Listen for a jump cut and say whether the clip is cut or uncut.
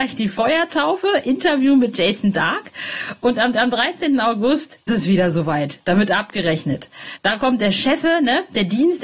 cut